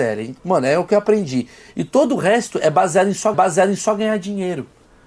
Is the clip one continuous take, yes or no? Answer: no